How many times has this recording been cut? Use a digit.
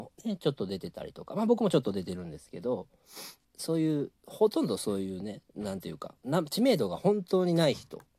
3